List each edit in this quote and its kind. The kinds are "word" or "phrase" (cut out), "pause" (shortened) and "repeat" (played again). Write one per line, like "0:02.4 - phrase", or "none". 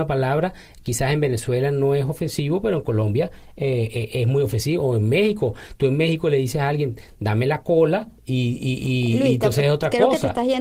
0:08.2 - pause